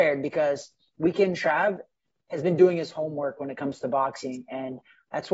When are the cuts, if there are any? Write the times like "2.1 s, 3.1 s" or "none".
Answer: none